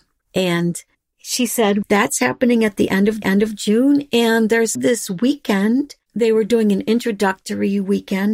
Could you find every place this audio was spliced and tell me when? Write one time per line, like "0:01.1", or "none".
0:01.8
0:03.2
0:04.8
0:06.0

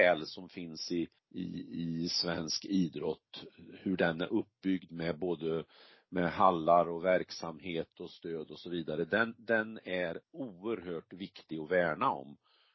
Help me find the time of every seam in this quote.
0:01.2
0:10.2

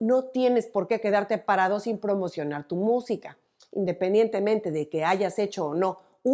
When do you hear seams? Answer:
none

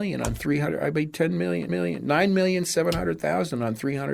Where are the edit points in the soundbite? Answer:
0:01.7

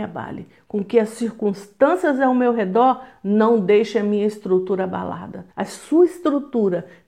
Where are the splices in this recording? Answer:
0:05.5

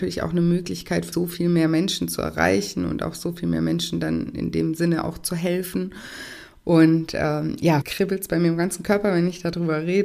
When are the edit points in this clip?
0:01.1
0:04.3
0:07.8

